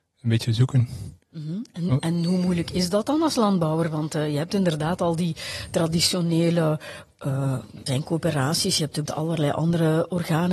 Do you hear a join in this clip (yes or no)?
yes